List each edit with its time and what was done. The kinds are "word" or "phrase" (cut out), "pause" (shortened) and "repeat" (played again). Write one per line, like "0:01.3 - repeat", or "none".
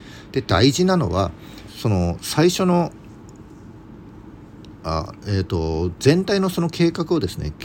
0:01.7 - phrase